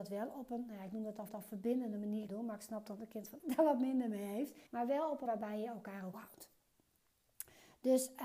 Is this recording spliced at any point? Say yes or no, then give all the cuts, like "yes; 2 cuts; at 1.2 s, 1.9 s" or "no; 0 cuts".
yes; 6 cuts; at 1.3 s, 2.3 s, 3.4 s, 4.7 s, 5.3 s, 6.1 s